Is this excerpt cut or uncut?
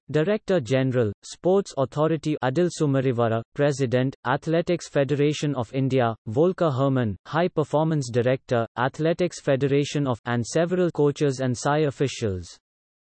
cut